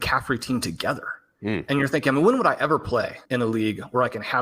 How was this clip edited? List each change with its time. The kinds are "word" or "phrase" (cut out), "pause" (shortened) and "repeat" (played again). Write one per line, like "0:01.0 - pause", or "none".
0:03.3 - pause